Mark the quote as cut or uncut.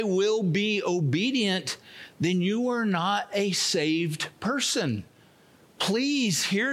uncut